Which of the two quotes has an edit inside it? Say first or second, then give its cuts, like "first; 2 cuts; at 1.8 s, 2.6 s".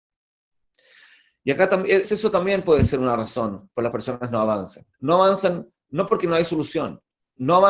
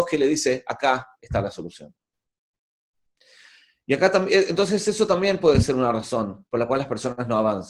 first; 3 cuts; at 2.0 s, 3.9 s, 4.9 s